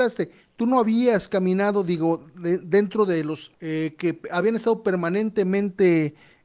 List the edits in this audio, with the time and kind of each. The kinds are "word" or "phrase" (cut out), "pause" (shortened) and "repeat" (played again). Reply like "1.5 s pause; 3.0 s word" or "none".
3.5 s pause